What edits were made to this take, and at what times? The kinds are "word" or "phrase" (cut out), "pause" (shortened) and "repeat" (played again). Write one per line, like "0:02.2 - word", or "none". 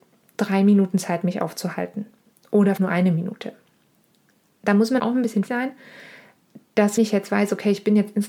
0:02.8 - word
0:05.0 - word
0:05.5 - word
0:07.0 - word